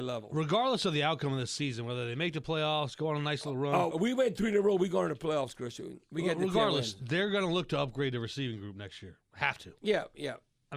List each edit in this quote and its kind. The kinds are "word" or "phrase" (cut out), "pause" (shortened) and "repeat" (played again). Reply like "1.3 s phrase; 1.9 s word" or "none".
3.9 s word